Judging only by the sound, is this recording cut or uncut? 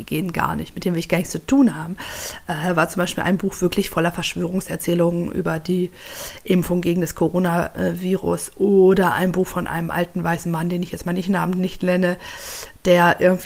uncut